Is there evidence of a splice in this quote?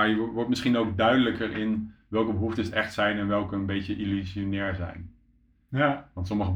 no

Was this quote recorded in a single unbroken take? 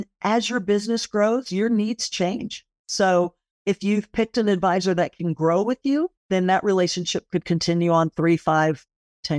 no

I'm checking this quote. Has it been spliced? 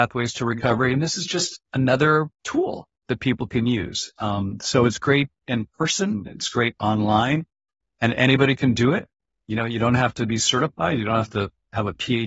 no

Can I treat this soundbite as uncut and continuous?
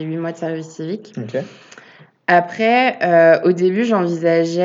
yes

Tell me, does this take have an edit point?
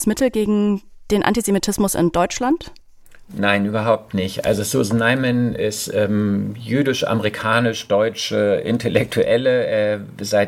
no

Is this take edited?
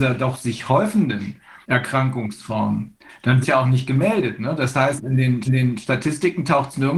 yes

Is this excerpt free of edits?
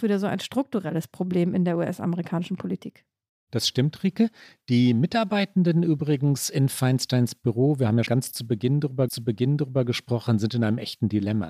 no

